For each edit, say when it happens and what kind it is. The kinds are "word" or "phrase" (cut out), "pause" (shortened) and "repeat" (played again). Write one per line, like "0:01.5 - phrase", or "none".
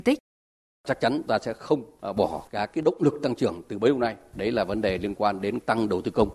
0:01.3 - word
0:02.5 - word